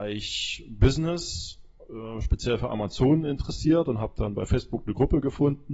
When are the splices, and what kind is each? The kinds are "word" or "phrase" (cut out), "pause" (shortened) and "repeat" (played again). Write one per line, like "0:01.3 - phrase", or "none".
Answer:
none